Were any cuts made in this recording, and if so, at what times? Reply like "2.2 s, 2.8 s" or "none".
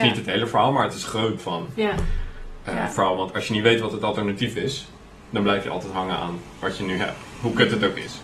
1.4 s